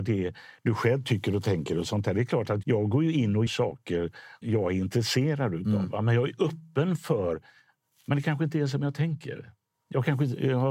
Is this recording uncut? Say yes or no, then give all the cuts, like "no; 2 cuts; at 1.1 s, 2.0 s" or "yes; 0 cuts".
no; 3 cuts; at 2.6 s, 3.5 s, 4.4 s